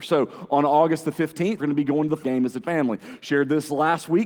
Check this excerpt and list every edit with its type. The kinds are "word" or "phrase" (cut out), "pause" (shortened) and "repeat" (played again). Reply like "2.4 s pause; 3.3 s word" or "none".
1.6 s word; 2.2 s word; 2.6 s word